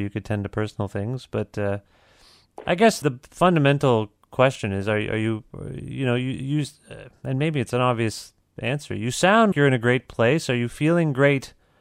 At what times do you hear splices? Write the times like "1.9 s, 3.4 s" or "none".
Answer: 3.0 s, 9.5 s

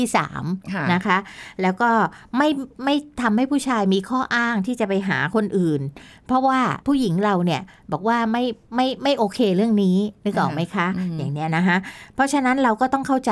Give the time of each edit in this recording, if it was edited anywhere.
6.8 s

